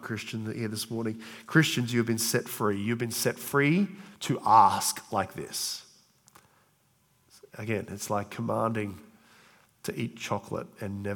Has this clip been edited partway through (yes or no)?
no